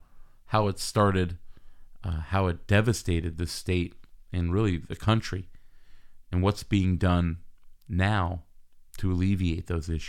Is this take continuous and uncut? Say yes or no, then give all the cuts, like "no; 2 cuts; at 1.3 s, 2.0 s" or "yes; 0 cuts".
no; 1 cut; at 8.9 s